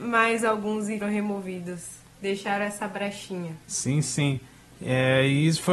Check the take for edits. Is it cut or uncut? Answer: cut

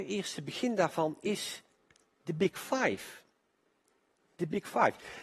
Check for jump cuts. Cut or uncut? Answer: uncut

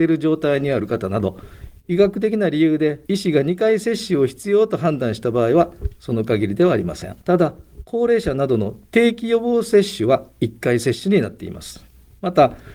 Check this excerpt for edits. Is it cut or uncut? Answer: cut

